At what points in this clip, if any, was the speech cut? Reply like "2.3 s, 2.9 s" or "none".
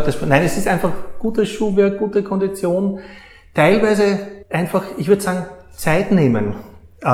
4.4 s